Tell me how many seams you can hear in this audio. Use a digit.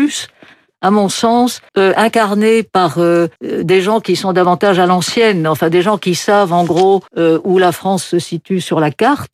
3